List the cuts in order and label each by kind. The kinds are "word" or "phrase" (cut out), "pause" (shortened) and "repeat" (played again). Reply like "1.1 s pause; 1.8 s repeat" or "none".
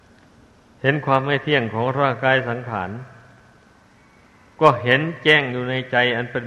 none